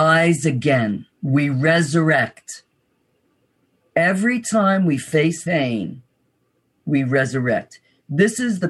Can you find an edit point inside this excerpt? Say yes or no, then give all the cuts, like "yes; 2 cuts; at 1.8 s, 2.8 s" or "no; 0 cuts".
yes; 2 cuts; at 1.1 s, 5.5 s